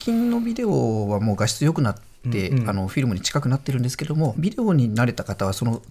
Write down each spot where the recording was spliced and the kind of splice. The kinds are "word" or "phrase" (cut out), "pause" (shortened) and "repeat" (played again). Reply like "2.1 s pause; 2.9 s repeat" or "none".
4.3 s phrase